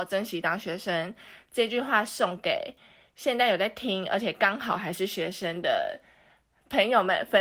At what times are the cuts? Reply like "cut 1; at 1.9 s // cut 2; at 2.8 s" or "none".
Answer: none